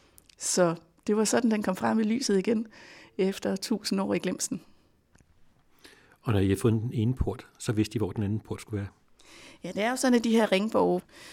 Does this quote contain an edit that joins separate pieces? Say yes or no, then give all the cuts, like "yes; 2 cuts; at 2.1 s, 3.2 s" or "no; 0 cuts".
no; 0 cuts